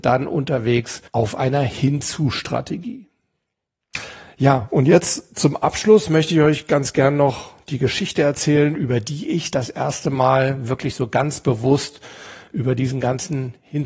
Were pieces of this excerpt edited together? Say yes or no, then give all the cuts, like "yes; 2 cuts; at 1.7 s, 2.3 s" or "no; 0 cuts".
yes; 1 cut; at 1.1 s